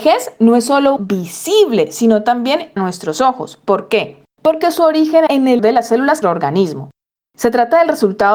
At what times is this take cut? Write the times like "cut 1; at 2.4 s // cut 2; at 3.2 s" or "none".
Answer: cut 1; at 1.0 s // cut 2; at 2.8 s // cut 3; at 4.3 s // cut 4; at 5.3 s // cut 5; at 5.6 s // cut 6; at 6.2 s